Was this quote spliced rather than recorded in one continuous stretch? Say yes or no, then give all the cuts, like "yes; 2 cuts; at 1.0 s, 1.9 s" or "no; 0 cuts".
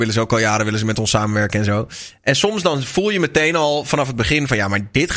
no; 0 cuts